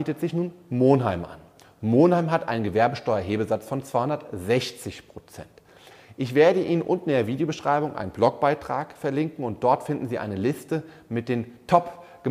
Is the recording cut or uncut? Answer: uncut